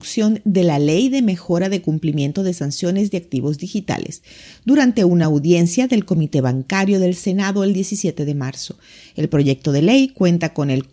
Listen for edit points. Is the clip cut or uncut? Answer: uncut